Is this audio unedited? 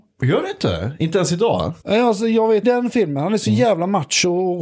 no; 2 cuts; at 1.8 s, 2.6 s

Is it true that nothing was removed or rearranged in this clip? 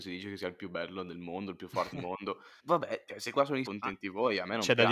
no; 4 cuts; at 1.9 s, 2.6 s, 3.3 s, 3.7 s

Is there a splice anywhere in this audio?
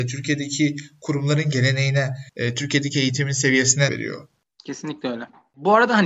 yes; 2 cuts; at 2.3 s, 3.9 s

